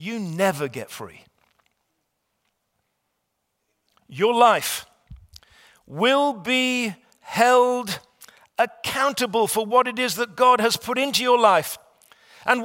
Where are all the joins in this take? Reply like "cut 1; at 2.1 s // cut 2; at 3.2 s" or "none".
none